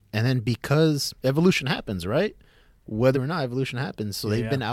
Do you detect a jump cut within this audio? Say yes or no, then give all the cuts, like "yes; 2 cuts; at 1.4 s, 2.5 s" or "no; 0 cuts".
yes; 2 cuts; at 1.2 s, 3.1 s